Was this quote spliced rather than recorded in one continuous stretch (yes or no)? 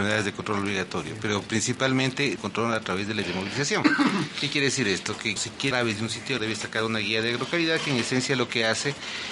yes